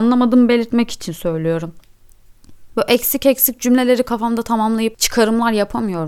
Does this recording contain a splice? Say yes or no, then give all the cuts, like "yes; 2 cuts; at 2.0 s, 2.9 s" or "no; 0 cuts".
no; 0 cuts